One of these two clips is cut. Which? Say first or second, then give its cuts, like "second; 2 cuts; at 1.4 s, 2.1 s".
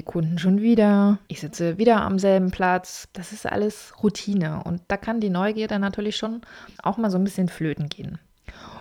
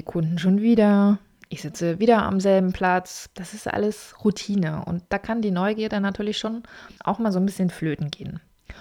first; 1 cut; at 1.2 s